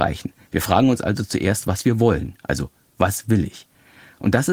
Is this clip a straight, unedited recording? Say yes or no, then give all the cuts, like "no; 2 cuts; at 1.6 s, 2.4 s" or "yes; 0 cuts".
yes; 0 cuts